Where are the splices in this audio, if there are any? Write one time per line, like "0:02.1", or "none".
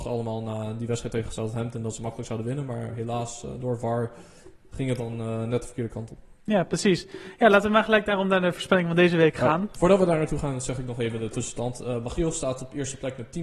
none

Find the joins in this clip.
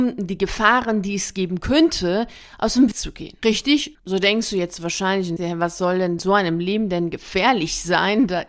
0:02.9
0:05.4
0:06.2

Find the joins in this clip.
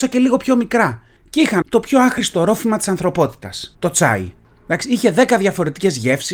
0:01.6
0:03.7

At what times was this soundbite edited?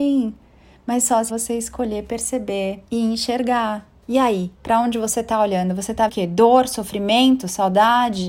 0:01.3
0:02.9
0:04.0
0:04.5
0:06.1

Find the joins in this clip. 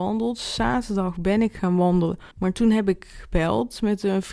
0:02.3

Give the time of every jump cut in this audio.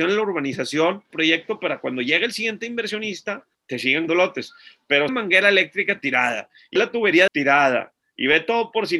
0:01.1
0:03.5
0:04.1
0:05.1
0:06.8
0:07.3

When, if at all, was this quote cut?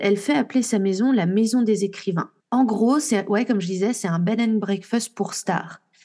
0:02.4

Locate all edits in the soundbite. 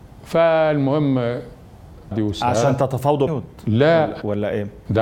0:02.1
0:03.3

